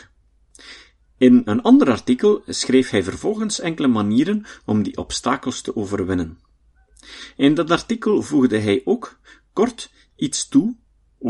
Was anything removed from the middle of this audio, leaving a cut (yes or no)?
no